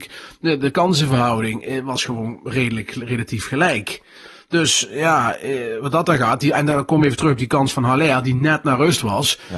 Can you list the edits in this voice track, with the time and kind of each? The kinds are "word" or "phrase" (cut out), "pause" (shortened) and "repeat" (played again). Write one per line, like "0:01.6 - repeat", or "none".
none